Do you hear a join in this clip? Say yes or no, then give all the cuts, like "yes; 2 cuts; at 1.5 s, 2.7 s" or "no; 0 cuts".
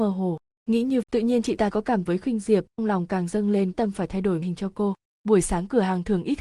yes; 6 cuts; at 1.0 s, 1.7 s, 2.1 s, 2.8 s, 3.7 s, 4.4 s